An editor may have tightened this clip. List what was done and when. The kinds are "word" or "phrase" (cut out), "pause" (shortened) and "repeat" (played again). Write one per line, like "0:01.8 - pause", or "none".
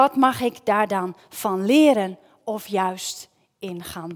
none